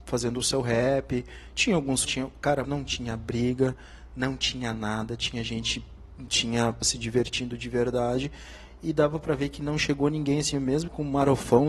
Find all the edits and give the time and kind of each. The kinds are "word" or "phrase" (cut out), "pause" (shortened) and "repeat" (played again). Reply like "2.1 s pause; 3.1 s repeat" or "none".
2.0 s phrase; 2.6 s word; 6.8 s word